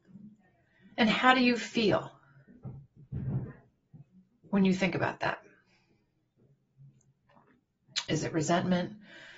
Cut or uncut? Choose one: uncut